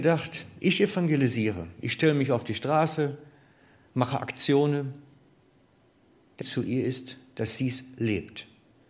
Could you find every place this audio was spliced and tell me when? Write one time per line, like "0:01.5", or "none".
0:06.4

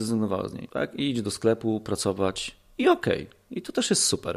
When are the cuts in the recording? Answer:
none

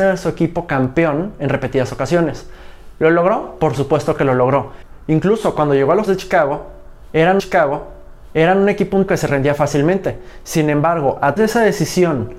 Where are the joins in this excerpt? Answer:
0:06.1
0:07.4
0:09.1
0:11.4

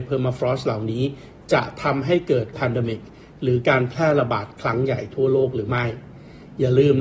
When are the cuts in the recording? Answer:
0:02.5

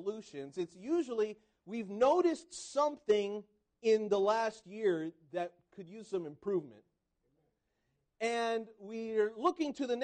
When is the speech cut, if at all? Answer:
none

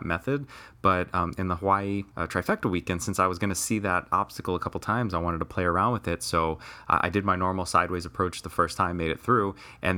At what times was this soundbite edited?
0:02.1

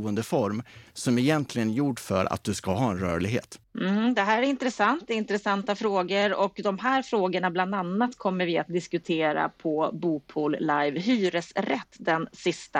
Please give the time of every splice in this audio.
0:03.6

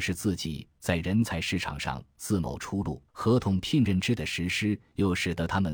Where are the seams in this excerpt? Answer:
0:03.1

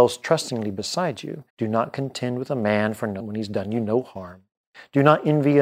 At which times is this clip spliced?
0:01.5
0:03.2

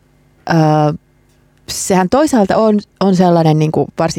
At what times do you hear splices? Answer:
none

